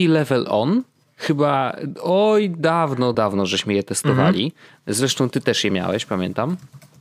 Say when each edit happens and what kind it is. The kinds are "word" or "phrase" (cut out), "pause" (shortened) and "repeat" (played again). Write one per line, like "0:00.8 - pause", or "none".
0:03.1 - word